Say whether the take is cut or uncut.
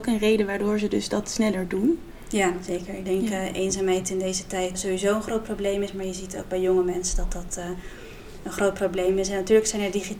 cut